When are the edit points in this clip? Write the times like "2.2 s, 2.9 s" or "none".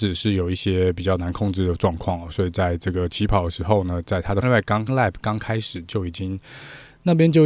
4.4 s, 4.9 s